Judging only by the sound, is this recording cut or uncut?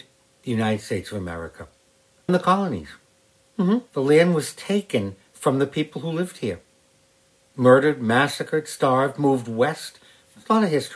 cut